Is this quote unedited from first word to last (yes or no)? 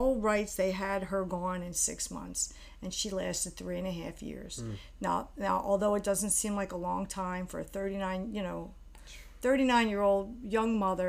yes